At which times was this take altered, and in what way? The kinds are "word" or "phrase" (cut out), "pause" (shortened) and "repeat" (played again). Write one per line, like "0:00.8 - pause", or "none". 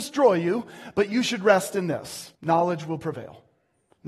0:02.3 - pause